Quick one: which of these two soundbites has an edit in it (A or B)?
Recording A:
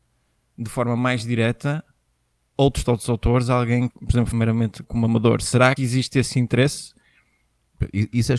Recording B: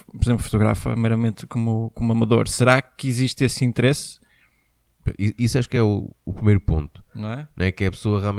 A